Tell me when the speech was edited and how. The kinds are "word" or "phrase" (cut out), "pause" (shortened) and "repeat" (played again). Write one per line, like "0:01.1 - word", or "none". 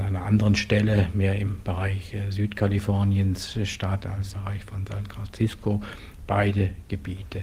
0:04.3 - word